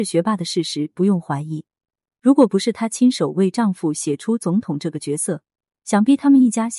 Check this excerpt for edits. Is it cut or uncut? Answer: uncut